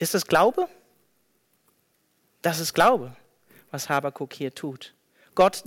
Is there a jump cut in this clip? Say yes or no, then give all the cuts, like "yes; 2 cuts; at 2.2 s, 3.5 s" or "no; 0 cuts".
no; 0 cuts